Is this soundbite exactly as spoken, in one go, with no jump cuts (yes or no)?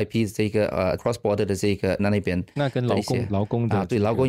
no